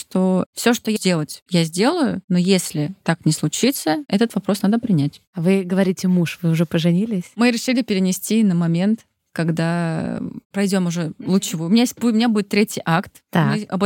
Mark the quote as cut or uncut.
cut